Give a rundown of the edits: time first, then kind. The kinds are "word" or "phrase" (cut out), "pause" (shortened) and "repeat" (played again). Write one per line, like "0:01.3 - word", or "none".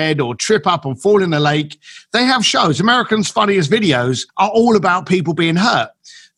0:04.3 - pause